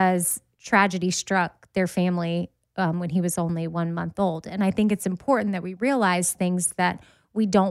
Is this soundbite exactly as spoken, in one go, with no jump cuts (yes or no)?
yes